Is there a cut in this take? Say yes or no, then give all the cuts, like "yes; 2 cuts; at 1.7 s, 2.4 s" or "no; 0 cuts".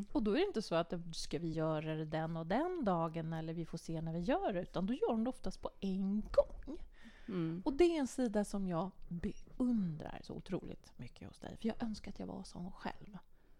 no; 0 cuts